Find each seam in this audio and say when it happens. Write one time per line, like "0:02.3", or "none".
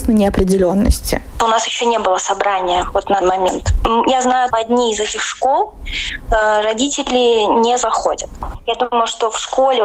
0:03.2
0:04.5